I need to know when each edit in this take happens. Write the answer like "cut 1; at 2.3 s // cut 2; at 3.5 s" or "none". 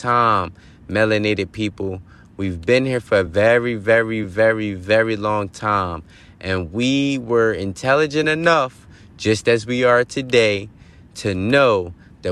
none